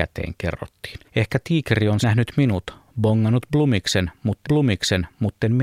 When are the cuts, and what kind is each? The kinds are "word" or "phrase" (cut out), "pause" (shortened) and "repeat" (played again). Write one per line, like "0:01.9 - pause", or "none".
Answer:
0:01.1 - pause
0:02.0 - word
0:04.4 - repeat